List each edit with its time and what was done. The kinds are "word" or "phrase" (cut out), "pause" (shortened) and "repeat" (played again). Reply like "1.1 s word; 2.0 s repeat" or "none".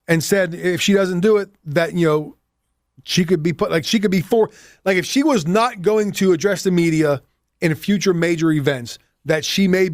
none